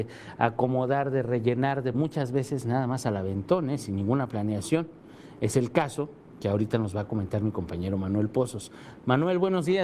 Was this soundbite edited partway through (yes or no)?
yes